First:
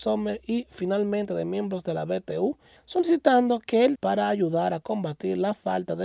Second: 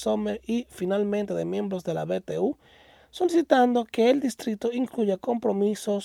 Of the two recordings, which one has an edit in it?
first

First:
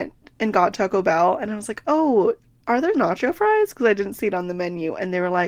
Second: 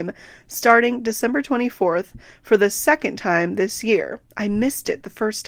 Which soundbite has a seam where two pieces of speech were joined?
first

